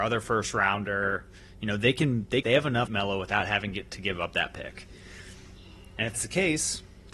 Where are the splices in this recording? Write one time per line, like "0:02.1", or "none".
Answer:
0:02.4
0:02.9
0:06.1